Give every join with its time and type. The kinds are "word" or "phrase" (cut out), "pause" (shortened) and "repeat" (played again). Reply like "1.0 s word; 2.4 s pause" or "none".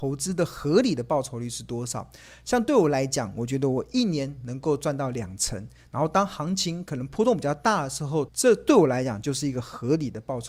8.3 s phrase

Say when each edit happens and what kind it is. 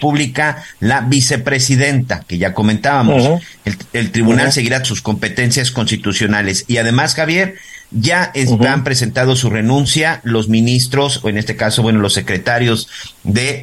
4.8 s phrase

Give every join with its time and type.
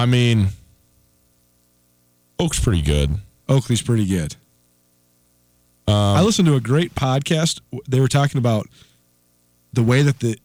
none

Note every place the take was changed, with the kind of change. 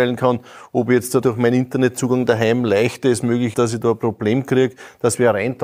1.2 s word; 3.5 s word

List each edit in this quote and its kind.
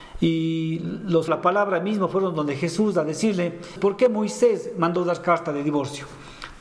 1.3 s phrase; 3.8 s word

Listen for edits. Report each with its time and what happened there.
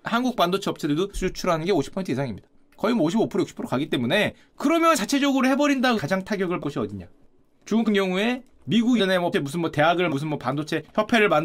1.1 s word; 4.9 s word; 6.0 s word; 6.6 s word; 7.9 s word; 9.0 s word; 9.3 s word; 10.1 s word

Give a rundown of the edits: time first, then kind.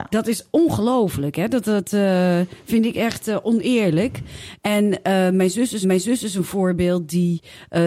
5.8 s repeat

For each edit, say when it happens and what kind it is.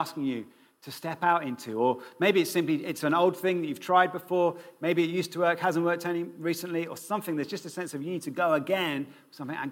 none

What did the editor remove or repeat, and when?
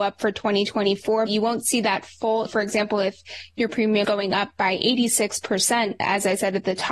1.3 s word; 2.5 s word; 4.0 s word

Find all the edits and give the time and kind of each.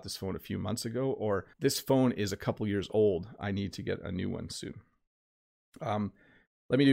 1.5 s pause

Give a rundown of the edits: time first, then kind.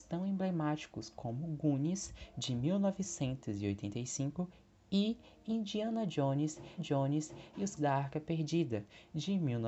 6.8 s repeat; 7.8 s word

